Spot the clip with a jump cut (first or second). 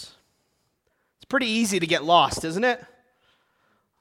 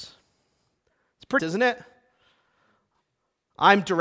second